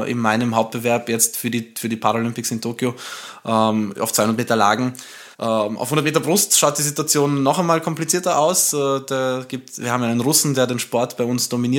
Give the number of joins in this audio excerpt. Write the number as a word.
one